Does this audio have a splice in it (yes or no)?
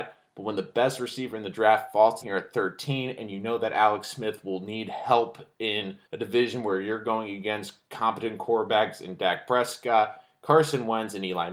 yes